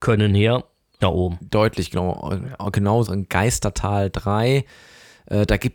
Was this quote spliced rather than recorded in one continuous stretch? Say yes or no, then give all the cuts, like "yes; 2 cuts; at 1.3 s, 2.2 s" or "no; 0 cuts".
yes; 2 cuts; at 1.0 s, 3.1 s